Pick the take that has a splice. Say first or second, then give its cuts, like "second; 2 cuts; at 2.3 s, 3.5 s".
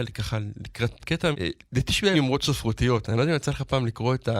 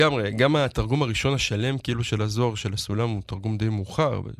first; 3 cuts; at 1.0 s, 1.3 s, 2.1 s